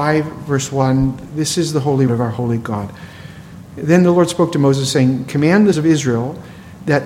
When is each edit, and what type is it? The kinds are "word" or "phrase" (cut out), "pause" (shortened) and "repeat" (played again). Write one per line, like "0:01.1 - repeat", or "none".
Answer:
0:02.1 - word
0:05.7 - word